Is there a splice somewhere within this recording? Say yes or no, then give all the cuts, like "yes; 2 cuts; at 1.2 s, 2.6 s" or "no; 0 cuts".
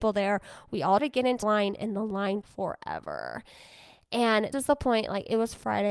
yes; 4 cuts; at 1.0 s, 1.4 s, 2.4 s, 4.5 s